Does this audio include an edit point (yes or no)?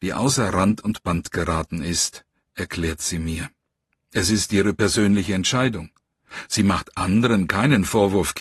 no